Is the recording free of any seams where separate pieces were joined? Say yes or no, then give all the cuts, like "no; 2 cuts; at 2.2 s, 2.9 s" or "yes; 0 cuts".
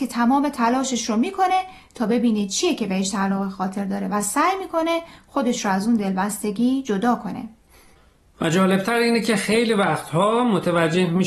yes; 0 cuts